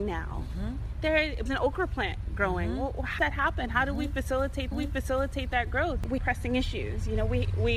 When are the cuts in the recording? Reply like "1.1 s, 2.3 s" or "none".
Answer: 1.5 s, 3.2 s, 4.7 s, 6.2 s